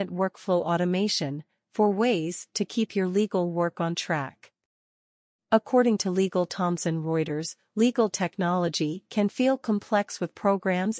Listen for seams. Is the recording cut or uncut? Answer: uncut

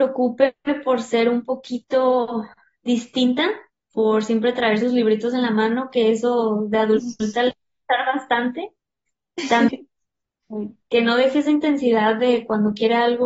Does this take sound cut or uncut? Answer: uncut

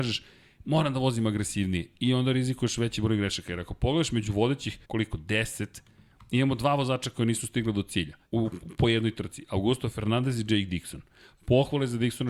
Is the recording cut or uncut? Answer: cut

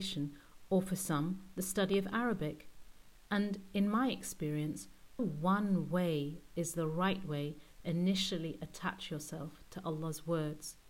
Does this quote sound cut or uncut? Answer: cut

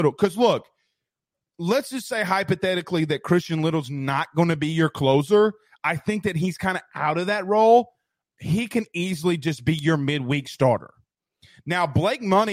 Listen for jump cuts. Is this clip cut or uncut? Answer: uncut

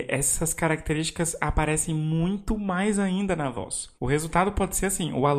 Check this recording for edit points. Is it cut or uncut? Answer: cut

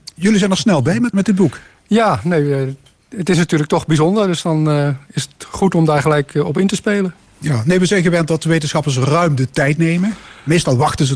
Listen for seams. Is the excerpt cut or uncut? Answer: cut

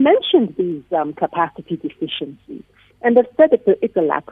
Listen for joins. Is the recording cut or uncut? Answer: uncut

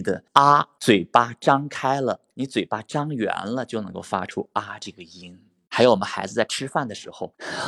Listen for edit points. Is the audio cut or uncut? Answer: uncut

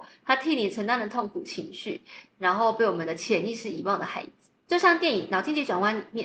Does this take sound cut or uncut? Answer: uncut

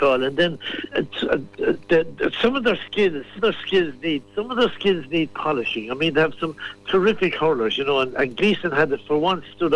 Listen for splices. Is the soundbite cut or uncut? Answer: cut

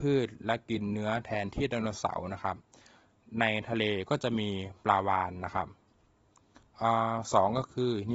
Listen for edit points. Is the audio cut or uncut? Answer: uncut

